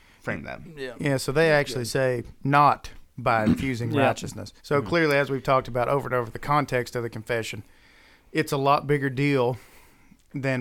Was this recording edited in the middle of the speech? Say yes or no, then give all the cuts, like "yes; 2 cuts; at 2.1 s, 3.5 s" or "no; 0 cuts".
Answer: yes; 1 cut; at 4.6 s